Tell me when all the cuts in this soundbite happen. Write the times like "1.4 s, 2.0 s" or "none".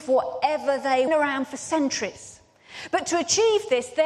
1.1 s